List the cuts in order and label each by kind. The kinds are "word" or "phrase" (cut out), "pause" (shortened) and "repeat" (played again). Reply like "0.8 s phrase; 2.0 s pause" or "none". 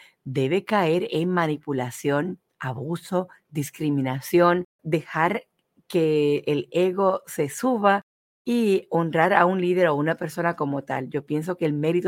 4.8 s word

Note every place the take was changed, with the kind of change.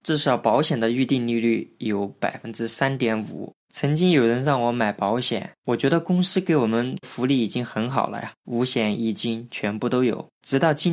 3.6 s pause

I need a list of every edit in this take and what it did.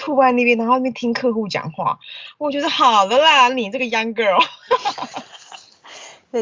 none

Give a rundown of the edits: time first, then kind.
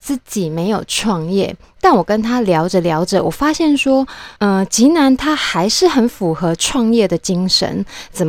4.4 s pause

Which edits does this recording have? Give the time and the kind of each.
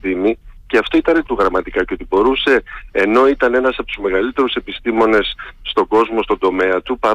1.3 s word

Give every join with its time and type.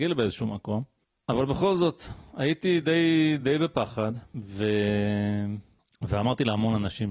none

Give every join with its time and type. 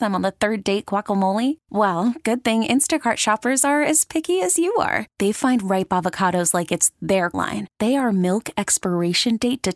7.3 s phrase

